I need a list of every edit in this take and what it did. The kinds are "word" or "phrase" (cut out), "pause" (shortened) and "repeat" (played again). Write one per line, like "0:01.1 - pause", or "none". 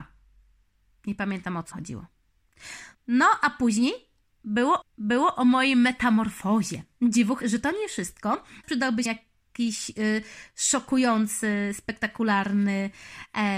0:01.7 - word
0:02.9 - pause
0:04.8 - repeat
0:07.4 - word
0:08.6 - phrase
0:09.1 - word

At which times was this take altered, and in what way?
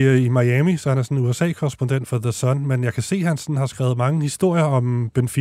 none

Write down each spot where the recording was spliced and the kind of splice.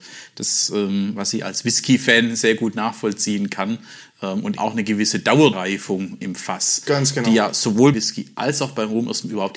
0:04.6 - word
0:05.5 - word
0:06.2 - word
0:07.9 - word

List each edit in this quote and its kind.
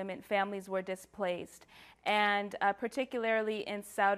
none

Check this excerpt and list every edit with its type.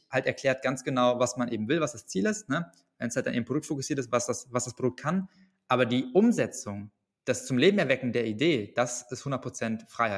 none

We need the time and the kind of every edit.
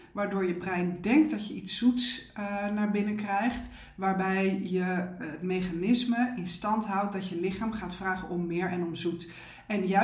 none

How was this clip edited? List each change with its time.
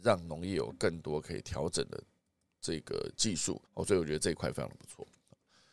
0:03.6 - pause

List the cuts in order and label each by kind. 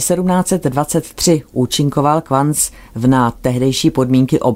none

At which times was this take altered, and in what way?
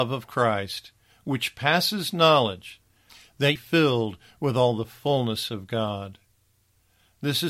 0:03.6 - phrase

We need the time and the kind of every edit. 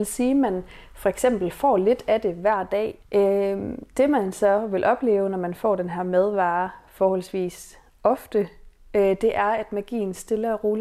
0:03.0 - pause

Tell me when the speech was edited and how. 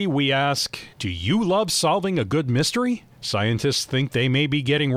0:00.9 - pause
0:03.1 - pause

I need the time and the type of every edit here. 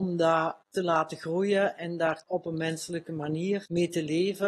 0:02.2 - word

